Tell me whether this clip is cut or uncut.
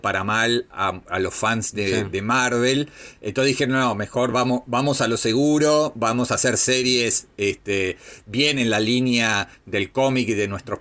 uncut